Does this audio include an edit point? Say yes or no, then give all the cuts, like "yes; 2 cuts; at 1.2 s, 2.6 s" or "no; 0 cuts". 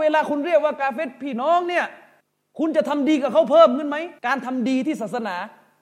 yes; 2 cuts; at 2.2 s, 4.2 s